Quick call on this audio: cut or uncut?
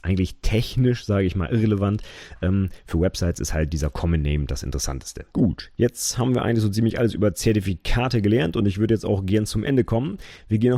cut